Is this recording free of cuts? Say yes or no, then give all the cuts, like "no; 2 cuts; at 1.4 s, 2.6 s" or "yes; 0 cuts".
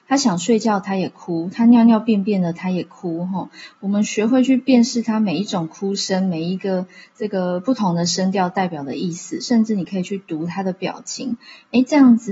yes; 0 cuts